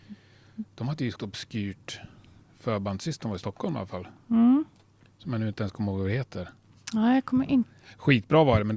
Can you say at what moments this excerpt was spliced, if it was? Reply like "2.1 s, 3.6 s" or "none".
1.2 s